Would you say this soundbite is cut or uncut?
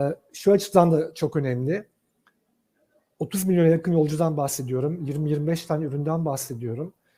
uncut